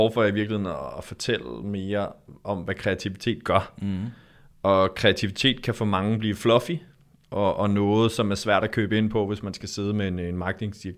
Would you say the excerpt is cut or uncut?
uncut